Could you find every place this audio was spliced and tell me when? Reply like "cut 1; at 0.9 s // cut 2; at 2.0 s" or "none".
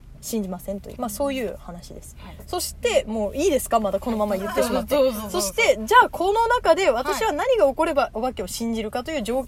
cut 1; at 1.0 s